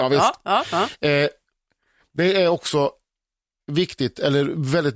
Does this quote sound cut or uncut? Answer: uncut